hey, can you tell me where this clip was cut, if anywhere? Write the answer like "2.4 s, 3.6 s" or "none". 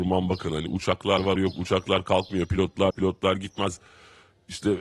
1.4 s, 2.9 s